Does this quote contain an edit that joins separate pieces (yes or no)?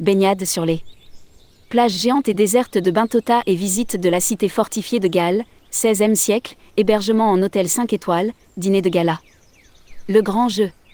no